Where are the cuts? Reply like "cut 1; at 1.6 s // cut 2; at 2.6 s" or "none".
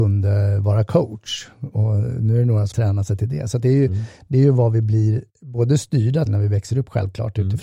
cut 1; at 2.7 s // cut 2; at 6.3 s